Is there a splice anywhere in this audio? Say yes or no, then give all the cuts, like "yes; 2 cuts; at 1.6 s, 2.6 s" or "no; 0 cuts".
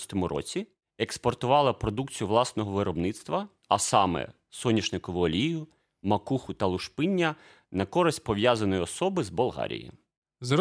no; 0 cuts